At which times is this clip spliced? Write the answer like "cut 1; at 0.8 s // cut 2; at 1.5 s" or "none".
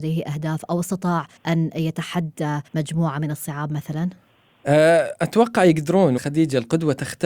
cut 1; at 1.4 s // cut 2; at 2.7 s // cut 3; at 6.2 s